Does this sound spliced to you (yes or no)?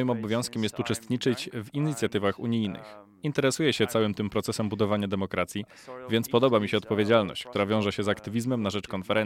no